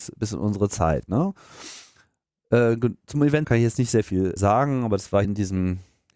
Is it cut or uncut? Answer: cut